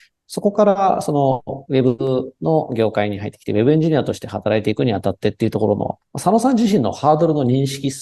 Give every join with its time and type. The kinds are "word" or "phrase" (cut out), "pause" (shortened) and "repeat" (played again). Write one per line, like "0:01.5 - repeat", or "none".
0:06.1 - pause